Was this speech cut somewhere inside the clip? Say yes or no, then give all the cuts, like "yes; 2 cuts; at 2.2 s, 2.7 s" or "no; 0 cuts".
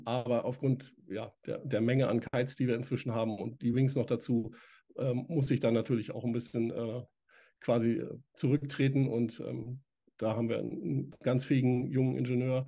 no; 0 cuts